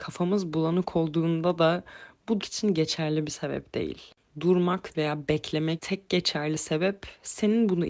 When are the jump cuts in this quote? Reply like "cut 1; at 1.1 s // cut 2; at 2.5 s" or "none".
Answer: cut 1; at 2.4 s // cut 2; at 4.9 s // cut 3; at 5.8 s

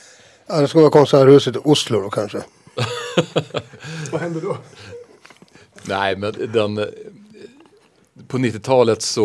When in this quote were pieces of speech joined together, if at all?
none

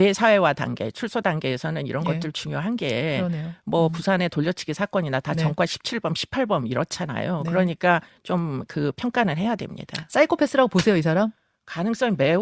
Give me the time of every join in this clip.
none

